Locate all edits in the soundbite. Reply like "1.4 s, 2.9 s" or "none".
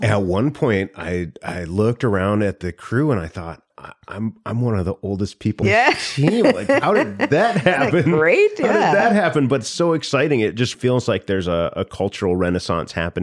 3.7 s, 5.6 s, 10.7 s